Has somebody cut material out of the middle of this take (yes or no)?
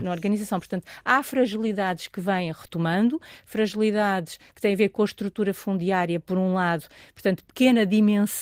no